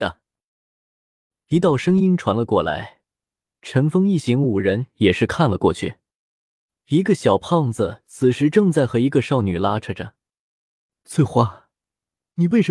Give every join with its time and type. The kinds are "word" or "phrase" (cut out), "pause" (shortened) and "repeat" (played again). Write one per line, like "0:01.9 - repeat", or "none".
none